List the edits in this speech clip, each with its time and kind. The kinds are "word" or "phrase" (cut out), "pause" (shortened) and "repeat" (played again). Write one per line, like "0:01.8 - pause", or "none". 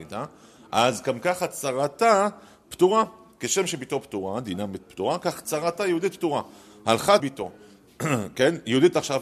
0:07.2 - word